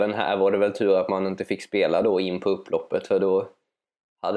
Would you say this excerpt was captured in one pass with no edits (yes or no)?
yes